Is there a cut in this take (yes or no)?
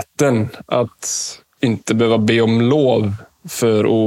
no